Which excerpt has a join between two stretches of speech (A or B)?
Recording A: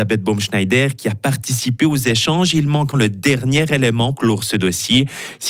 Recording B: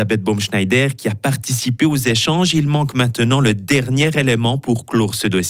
A